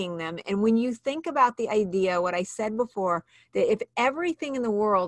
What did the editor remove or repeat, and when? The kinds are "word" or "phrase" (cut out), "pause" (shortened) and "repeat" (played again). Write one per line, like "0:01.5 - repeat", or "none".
none

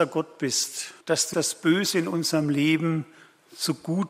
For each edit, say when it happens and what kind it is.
0:01.0 - pause
0:01.3 - word

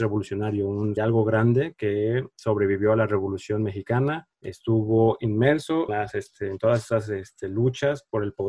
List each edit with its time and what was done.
0:01.0 - phrase
0:04.3 - pause
0:05.9 - word

